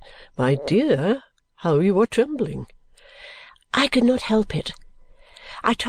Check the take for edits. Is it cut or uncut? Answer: uncut